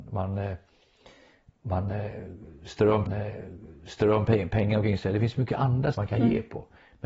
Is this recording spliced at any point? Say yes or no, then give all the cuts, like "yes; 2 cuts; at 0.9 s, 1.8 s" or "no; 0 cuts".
yes; 2 cuts; at 3.1 s, 5.9 s